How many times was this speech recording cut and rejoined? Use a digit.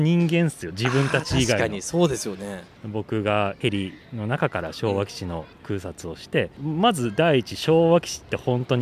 0